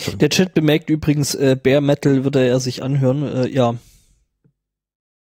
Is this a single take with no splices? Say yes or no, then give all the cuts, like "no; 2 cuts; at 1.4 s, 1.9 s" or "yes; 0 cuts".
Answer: yes; 0 cuts